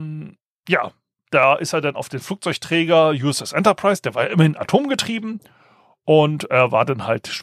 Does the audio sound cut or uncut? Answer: uncut